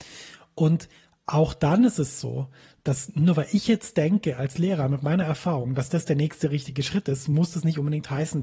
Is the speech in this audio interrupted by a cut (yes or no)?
no